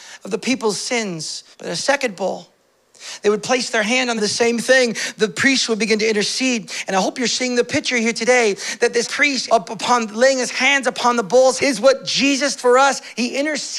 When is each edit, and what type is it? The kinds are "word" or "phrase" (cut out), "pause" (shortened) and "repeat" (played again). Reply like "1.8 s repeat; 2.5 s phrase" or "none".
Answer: 1.5 s pause; 4.2 s phrase; 9.0 s word; 9.5 s word; 11.6 s word; 12.6 s word